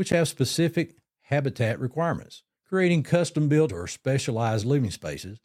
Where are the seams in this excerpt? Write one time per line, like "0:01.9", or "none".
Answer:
0:02.6
0:03.7